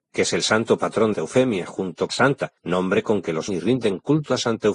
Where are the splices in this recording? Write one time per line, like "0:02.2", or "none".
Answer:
0:01.1
0:02.1
0:02.6
0:03.5